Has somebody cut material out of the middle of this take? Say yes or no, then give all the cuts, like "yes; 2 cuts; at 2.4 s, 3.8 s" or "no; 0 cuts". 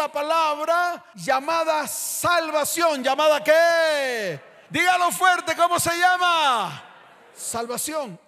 no; 0 cuts